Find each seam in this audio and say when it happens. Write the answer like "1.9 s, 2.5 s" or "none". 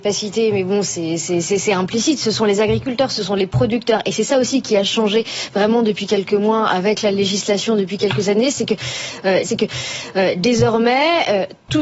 9.4 s